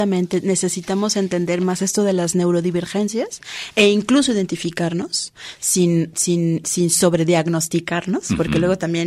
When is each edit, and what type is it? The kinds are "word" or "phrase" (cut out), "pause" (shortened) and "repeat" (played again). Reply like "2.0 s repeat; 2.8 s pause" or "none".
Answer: none